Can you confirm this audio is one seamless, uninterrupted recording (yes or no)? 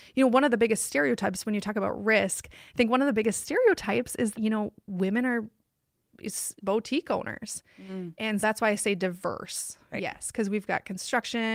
no